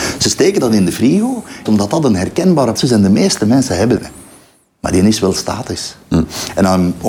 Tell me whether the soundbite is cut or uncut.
cut